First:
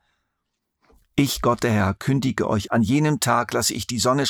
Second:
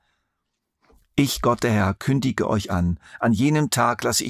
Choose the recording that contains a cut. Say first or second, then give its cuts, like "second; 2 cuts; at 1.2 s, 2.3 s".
first; 1 cut; at 2.7 s